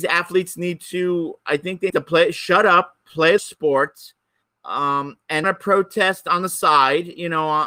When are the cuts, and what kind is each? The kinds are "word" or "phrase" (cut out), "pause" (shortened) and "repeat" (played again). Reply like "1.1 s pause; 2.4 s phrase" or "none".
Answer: 1.9 s word; 3.4 s word; 4.4 s pause; 5.4 s phrase